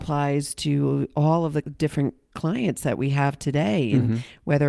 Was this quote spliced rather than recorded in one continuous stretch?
no; 0 cuts

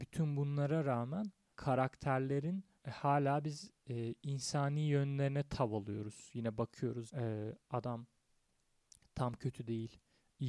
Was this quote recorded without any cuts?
no; 4 cuts; at 1.5 s, 2.8 s, 4.2 s, 7.1 s

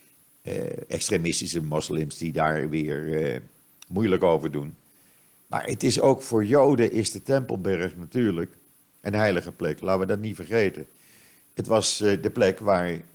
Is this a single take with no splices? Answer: yes; 0 cuts

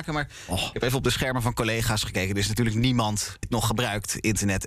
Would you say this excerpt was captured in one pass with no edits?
no; 1 cut; at 3.4 s

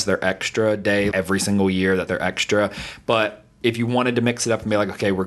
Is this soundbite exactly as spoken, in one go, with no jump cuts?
no; 2 cuts; at 1.1 s, 2.1 s

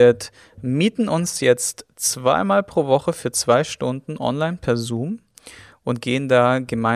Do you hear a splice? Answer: no; 0 cuts

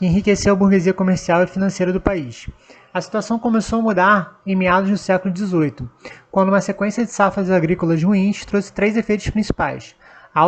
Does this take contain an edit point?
no; 0 cuts

